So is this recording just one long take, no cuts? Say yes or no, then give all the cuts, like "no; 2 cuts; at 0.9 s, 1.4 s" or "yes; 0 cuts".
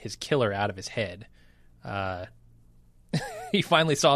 yes; 0 cuts